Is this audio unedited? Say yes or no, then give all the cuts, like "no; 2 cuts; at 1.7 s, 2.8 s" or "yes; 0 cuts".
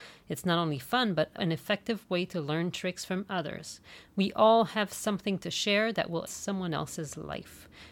no; 2 cuts; at 1.4 s, 6.3 s